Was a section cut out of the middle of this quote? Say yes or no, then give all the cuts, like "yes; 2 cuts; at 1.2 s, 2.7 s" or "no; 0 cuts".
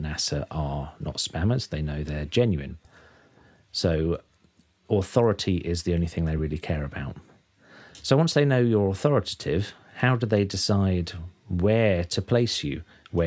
no; 0 cuts